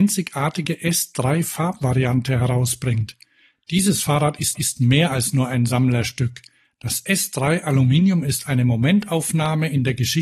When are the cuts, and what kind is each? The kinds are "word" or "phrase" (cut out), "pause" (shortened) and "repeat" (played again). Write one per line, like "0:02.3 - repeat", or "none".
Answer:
0:04.5 - repeat